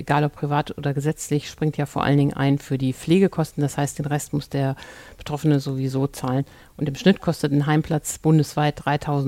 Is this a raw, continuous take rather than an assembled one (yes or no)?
yes